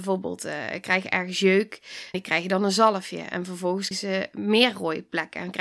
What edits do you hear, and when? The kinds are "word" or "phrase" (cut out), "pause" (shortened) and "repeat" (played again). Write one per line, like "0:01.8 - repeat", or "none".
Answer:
0:02.1 - word
0:03.9 - word